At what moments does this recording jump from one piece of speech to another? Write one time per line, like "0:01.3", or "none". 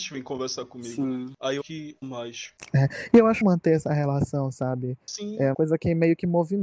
0:01.6
0:02.0
0:03.4
0:05.5